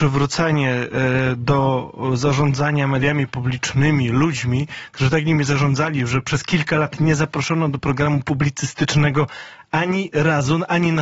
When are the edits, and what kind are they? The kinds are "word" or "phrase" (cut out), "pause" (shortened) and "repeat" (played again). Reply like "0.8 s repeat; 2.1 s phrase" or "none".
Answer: none